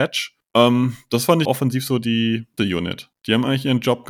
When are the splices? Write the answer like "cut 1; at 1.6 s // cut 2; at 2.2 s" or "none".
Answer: cut 1; at 1.4 s // cut 2; at 2.6 s